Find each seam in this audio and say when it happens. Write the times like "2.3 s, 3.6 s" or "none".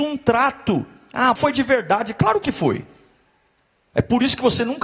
1.4 s